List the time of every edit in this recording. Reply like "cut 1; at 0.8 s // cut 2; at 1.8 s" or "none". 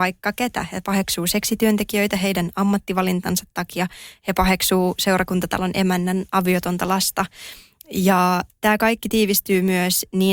none